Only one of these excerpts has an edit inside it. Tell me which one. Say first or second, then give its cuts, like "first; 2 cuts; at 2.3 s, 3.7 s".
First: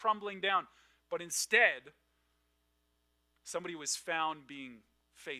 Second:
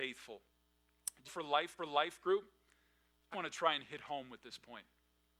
second; 3 cuts; at 1.3 s, 1.8 s, 3.3 s